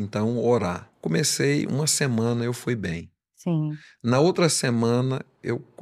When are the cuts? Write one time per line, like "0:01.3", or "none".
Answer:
0:00.9